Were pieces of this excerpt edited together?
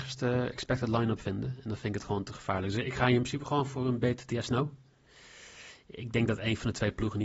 no; 0 cuts

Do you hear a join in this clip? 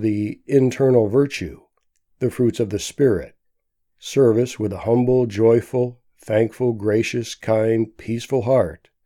no; 0 cuts

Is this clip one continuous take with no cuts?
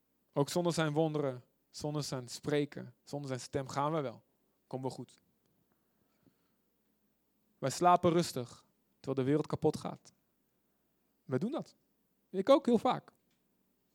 yes; 0 cuts

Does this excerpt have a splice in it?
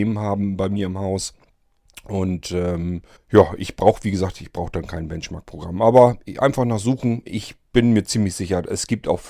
yes; 1 cut; at 3.2 s

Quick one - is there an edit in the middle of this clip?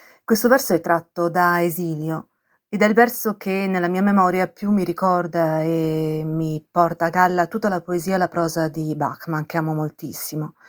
no; 0 cuts

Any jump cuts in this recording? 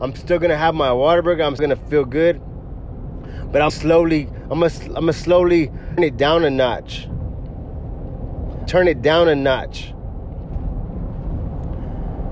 yes; 4 cuts; at 1.6 s, 3.7 s, 6.0 s, 8.7 s

